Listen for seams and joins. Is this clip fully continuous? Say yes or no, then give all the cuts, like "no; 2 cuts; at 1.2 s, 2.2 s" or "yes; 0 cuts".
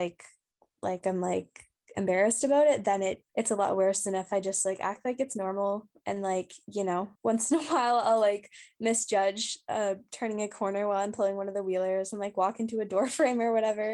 no; 2 cuts; at 3.3 s, 7.2 s